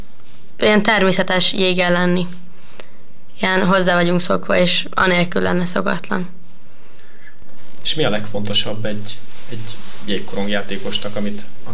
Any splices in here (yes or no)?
no